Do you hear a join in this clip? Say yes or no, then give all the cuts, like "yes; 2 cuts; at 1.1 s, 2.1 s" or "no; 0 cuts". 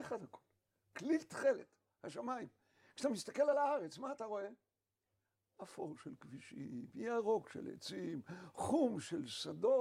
no; 0 cuts